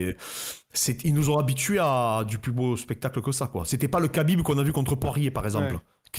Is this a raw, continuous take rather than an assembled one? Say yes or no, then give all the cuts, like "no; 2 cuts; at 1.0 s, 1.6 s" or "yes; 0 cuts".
yes; 0 cuts